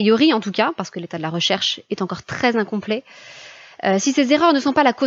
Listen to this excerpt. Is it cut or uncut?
uncut